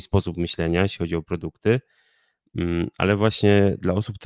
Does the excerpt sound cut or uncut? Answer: uncut